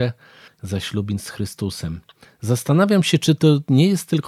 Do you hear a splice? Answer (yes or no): no